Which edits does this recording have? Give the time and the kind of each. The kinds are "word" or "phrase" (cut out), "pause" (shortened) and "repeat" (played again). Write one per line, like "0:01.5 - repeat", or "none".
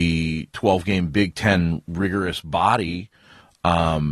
none